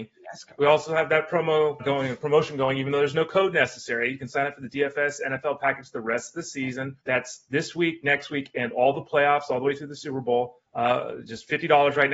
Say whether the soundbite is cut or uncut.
cut